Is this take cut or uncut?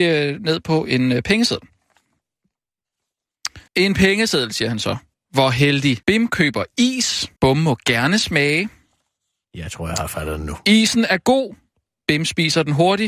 cut